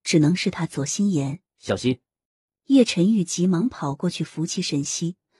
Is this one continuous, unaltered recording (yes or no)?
no